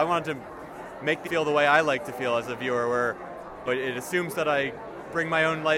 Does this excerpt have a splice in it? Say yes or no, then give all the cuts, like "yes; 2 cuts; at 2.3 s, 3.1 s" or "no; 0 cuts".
yes; 2 cuts; at 1.3 s, 3.7 s